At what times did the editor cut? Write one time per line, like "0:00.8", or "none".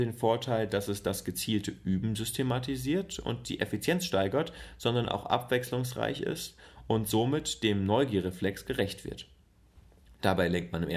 none